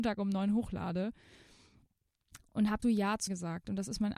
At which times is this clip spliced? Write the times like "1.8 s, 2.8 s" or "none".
2.8 s, 3.3 s

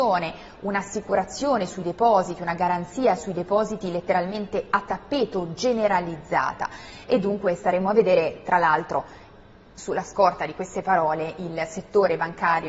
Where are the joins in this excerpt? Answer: none

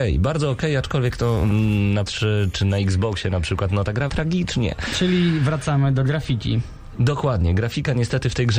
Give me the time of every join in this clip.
2.1 s, 4.1 s

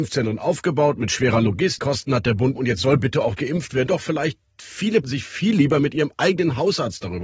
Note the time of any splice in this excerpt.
1.8 s, 2.6 s, 3.4 s, 3.9 s, 5.0 s

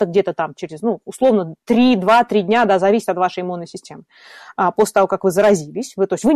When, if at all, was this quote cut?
1.6 s

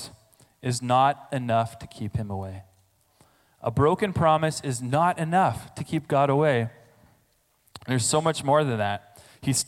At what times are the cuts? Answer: none

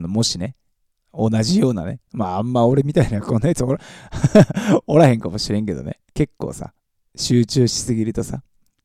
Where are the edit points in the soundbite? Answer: 6.1 s

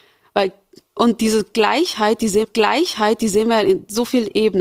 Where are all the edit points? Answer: 2.4 s

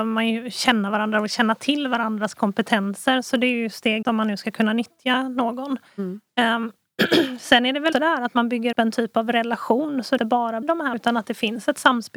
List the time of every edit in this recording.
4.0 s, 7.9 s, 8.7 s, 10.2 s, 10.6 s, 10.9 s

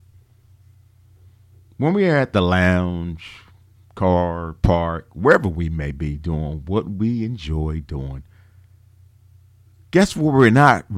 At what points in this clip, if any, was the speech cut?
none

